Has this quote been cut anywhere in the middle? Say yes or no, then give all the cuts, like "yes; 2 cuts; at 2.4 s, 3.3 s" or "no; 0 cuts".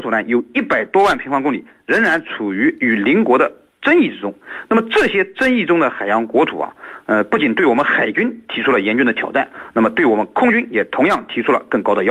no; 0 cuts